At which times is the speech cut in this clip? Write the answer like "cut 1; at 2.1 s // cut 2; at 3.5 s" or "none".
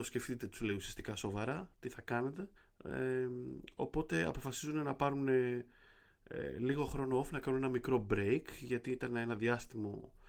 cut 1; at 2.6 s